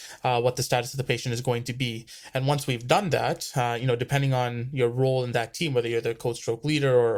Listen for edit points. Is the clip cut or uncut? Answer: uncut